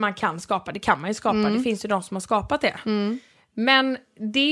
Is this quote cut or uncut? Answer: uncut